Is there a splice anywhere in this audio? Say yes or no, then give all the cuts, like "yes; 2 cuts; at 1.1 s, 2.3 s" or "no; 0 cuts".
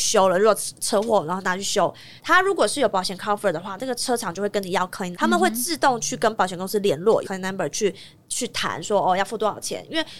yes; 3 cuts; at 2.2 s, 5.1 s, 7.2 s